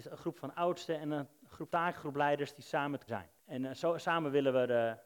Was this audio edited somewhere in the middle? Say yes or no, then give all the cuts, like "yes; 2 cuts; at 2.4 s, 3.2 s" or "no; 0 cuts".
yes; 3 cuts; at 1.7 s, 3.1 s, 3.4 s